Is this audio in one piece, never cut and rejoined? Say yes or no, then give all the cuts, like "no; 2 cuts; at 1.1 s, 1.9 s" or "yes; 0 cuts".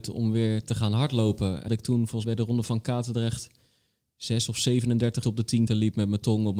no; 4 cuts; at 1.7 s, 2.2 s, 5.2 s, 5.7 s